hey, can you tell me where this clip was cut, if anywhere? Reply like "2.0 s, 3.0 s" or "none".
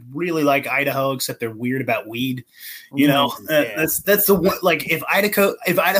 none